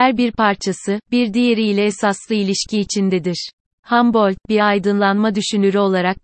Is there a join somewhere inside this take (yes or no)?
no